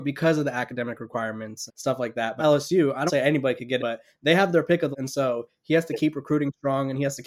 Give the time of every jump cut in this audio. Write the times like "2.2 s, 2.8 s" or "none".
1.7 s, 2.4 s, 3.1 s, 3.8 s, 4.9 s